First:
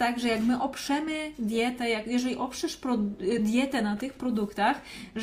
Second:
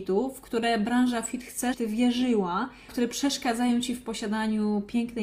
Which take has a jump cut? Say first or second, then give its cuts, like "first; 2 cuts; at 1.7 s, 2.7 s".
second; 2 cuts; at 1.7 s, 2.9 s